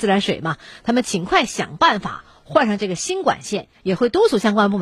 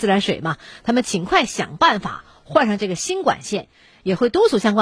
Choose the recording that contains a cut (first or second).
first